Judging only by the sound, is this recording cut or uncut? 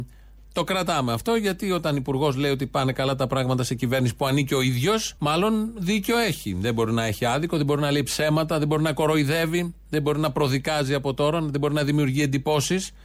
cut